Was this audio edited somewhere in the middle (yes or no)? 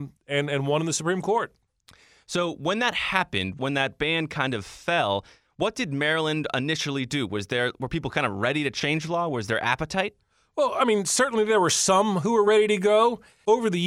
no